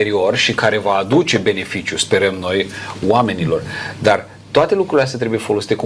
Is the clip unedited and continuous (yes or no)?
yes